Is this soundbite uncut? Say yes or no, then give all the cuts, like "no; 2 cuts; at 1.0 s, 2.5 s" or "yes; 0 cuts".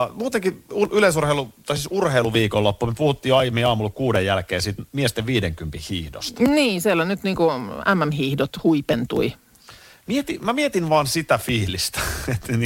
yes; 0 cuts